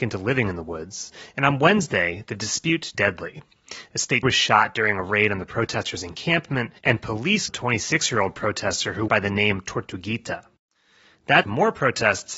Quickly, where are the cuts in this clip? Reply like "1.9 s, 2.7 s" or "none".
2.9 s, 4.2 s, 6.8 s, 7.5 s, 9.1 s, 11.4 s